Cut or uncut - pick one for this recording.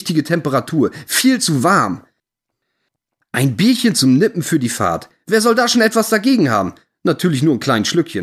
uncut